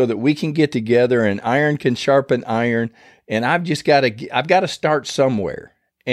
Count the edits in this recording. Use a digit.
0